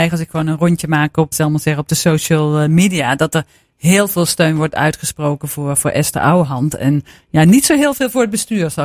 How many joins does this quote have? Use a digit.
1